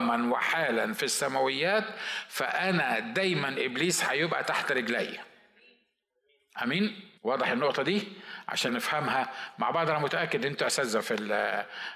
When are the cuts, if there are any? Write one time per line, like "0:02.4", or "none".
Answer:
0:07.2
0:08.7